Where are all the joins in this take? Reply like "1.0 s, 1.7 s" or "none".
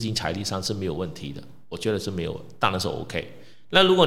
none